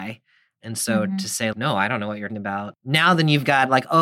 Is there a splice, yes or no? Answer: yes